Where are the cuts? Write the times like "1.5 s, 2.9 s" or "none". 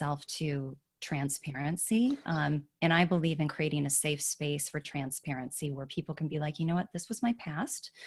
none